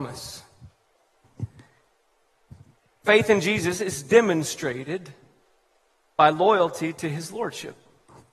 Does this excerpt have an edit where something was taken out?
no; 0 cuts

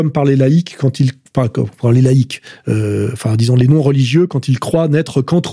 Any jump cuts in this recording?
no; 0 cuts

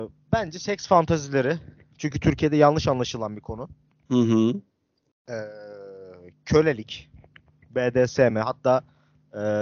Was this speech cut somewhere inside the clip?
no; 0 cuts

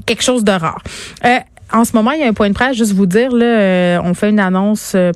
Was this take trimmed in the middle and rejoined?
no; 0 cuts

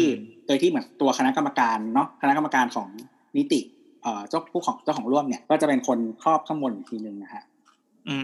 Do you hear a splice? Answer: yes; 1 cut; at 5.4 s

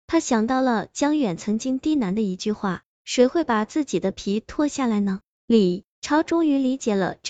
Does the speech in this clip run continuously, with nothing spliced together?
no; 1 cut; at 5.9 s

